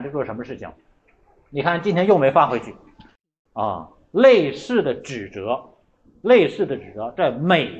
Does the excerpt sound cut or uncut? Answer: uncut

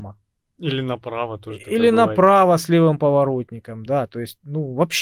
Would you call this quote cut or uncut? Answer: uncut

